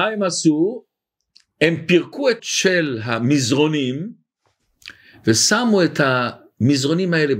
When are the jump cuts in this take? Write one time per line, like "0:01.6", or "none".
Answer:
0:02.4